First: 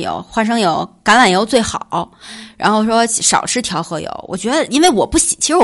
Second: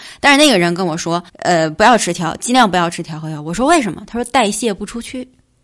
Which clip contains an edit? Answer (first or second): second